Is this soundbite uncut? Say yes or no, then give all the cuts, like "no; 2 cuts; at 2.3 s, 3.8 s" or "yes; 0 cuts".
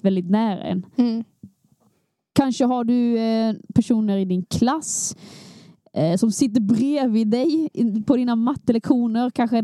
yes; 0 cuts